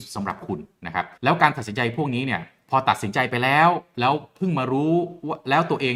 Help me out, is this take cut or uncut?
cut